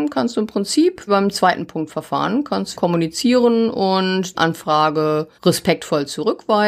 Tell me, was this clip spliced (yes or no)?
yes